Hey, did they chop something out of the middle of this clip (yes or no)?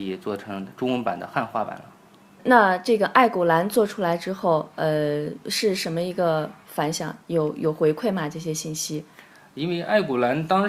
no